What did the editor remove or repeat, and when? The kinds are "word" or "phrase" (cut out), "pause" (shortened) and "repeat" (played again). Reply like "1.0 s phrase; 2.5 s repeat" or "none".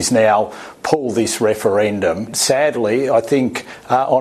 none